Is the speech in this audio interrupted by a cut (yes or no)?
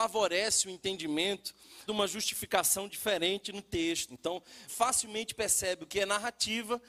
yes